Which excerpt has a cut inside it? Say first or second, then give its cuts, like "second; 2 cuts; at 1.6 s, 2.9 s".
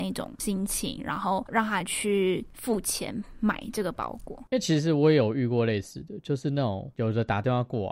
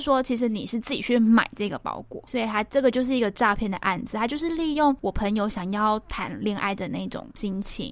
second; 1 cut; at 2.3 s